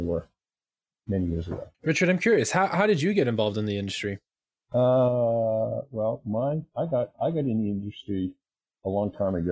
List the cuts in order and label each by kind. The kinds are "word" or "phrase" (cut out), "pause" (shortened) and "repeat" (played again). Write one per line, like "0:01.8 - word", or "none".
0:01.7 - pause